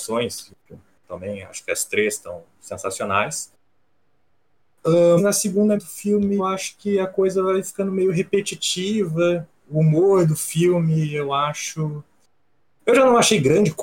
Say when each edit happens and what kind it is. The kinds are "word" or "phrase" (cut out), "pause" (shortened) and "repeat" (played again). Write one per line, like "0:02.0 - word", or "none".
0:05.2 - word
0:05.8 - word
0:06.4 - word
0:09.6 - word

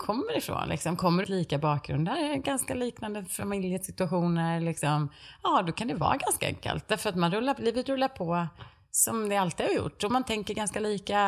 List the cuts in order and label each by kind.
0:01.2 - phrase

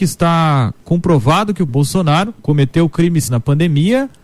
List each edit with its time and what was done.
0:01.7 - phrase
0:02.4 - pause
0:03.3 - word

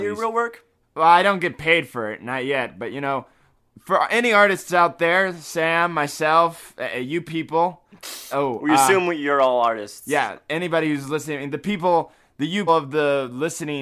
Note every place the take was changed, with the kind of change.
0:08.3 - word
0:12.7 - word

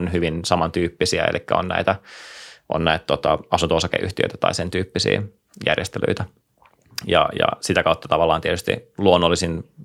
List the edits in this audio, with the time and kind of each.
none

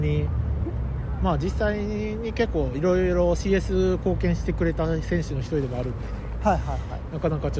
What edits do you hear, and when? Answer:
none

